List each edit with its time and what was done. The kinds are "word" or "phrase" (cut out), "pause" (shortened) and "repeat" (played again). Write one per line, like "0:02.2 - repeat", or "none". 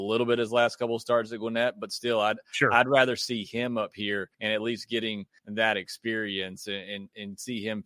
0:04.3 - pause
0:05.4 - pause

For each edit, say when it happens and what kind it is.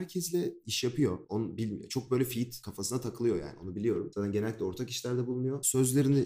none

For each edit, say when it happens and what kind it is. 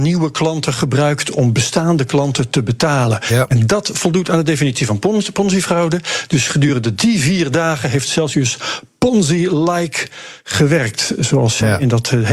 none

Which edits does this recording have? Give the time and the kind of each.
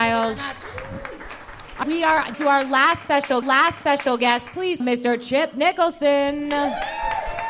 0:01.8 - word
0:02.3 - word
0:03.4 - repeat
0:04.8 - word

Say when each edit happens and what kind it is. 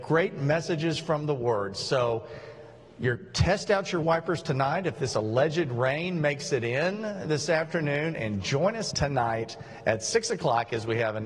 0:04.0 - word
0:08.9 - word

